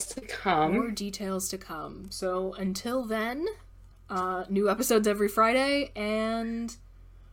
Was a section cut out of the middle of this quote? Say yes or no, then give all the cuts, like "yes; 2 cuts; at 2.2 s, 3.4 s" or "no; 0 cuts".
yes; 1 cut; at 3.9 s